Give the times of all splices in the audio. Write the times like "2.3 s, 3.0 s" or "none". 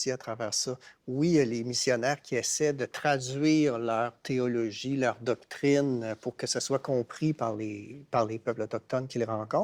none